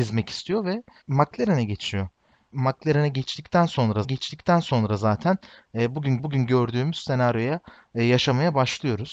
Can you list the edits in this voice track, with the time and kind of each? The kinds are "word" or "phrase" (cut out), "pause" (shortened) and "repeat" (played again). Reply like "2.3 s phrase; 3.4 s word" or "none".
4.0 s repeat; 6.2 s repeat